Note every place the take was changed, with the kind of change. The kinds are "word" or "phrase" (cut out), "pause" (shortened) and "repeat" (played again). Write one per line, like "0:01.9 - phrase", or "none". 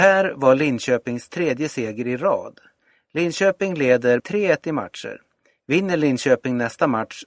0:04.2 - word